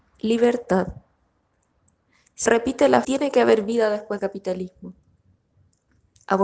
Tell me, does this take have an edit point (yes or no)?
yes